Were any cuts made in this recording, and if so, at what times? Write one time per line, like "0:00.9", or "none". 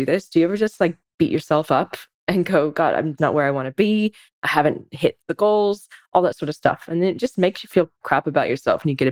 0:03.2
0:08.0